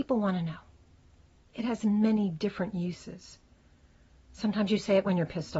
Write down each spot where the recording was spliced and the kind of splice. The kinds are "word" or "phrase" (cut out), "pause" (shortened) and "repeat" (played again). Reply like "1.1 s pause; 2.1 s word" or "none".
none

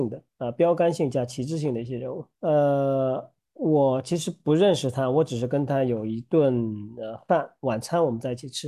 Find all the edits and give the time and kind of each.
2.3 s pause

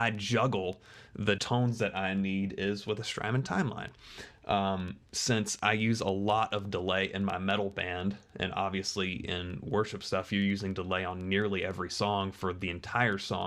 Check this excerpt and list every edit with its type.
1.4 s word

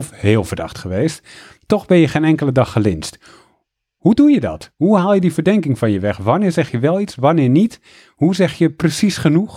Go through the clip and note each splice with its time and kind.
none

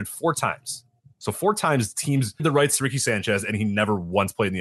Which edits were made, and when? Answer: 2.4 s word

